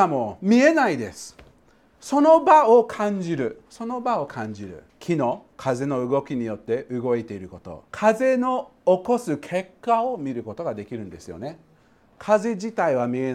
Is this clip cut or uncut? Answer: cut